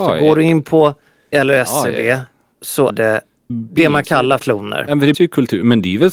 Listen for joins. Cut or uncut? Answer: cut